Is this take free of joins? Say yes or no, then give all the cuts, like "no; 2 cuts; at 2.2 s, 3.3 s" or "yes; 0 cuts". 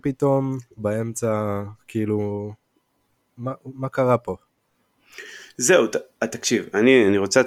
yes; 0 cuts